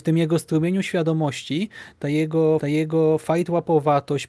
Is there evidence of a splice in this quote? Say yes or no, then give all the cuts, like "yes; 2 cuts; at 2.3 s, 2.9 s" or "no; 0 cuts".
yes; 1 cut; at 2.6 s